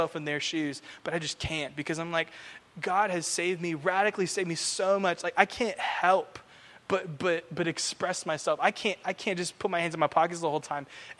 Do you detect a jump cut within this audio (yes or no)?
no